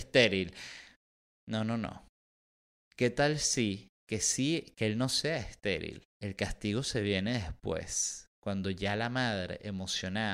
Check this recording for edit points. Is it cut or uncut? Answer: cut